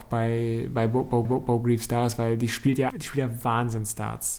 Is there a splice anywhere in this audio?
yes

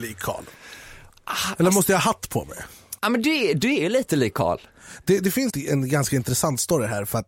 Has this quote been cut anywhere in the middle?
yes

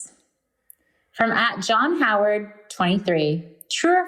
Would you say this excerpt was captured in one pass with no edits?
yes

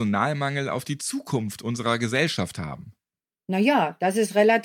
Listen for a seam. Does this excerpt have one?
no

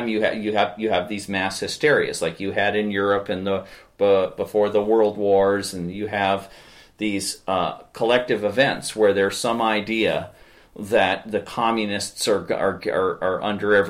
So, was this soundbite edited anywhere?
no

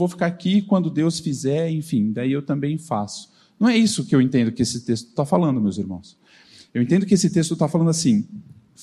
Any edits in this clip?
no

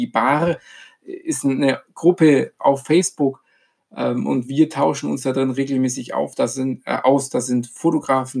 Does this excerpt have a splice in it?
no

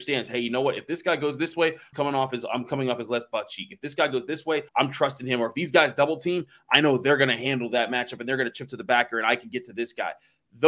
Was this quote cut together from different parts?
yes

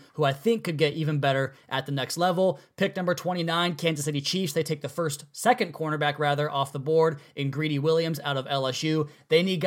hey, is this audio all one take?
yes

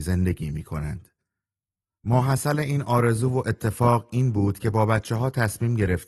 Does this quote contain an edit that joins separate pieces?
no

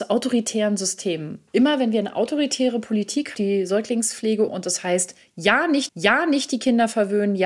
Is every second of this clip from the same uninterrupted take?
no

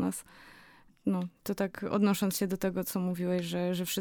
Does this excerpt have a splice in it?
no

